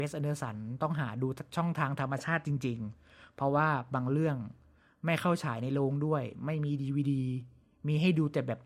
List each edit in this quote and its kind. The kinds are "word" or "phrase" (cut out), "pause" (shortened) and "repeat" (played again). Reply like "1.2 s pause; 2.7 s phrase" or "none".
none